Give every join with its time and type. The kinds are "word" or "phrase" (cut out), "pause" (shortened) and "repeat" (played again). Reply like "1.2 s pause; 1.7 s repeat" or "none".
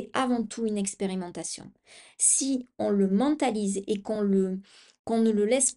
none